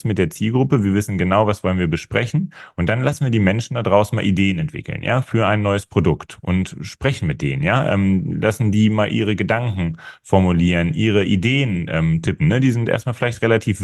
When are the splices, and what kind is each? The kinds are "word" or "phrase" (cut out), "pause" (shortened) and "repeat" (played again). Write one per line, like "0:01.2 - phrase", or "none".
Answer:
none